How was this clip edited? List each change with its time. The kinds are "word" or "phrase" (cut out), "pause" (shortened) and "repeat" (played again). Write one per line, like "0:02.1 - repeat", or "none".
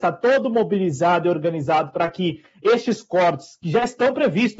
none

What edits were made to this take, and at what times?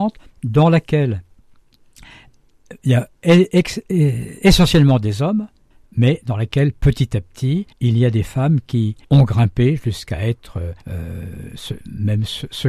0:03.2 - pause
0:05.7 - pause
0:07.7 - pause
0:09.0 - pause
0:10.8 - pause

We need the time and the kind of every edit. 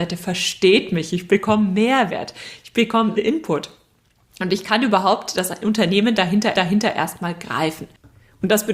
0:03.2 - phrase
0:06.5 - repeat

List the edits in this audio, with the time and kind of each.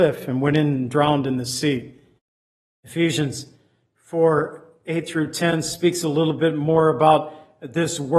0:02.2 - pause

